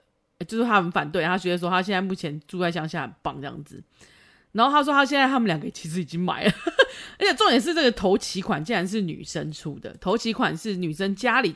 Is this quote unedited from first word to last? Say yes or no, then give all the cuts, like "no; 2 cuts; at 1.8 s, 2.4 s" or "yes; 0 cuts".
yes; 0 cuts